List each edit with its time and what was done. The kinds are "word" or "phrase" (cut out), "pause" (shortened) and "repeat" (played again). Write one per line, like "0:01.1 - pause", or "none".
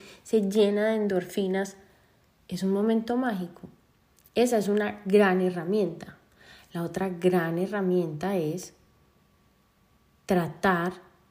none